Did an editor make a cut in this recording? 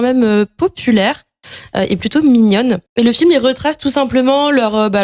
yes; 1 cut; at 2.9 s

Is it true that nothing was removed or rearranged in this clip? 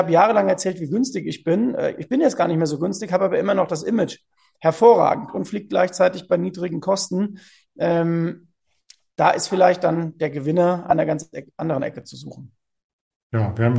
yes; 0 cuts

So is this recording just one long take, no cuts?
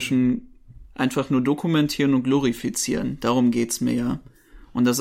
yes; 0 cuts

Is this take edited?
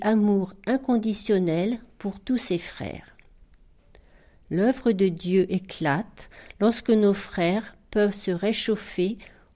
no; 0 cuts

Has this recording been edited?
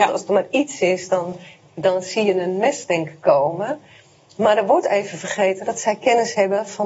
no; 0 cuts

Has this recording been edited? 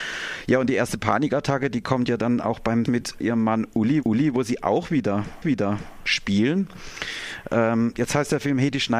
yes; 4 cuts; at 2.9 s, 3.2 s, 4.0 s, 5.4 s

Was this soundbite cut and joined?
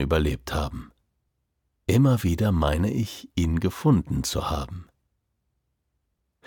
no; 0 cuts

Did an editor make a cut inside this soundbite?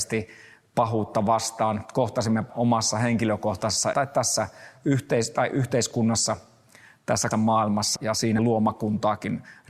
yes; 5 cuts; at 2.5 s, 3.9 s, 7.3 s, 8.0 s, 8.4 s

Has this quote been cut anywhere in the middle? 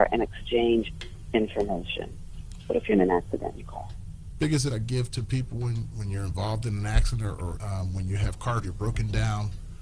yes; 4 cuts; at 4.7 s, 5.9 s, 7.5 s, 8.6 s

